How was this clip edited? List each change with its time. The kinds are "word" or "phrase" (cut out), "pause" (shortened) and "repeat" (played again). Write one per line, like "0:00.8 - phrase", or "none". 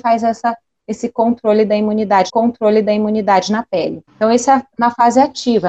0:02.3 - repeat
0:04.0 - pause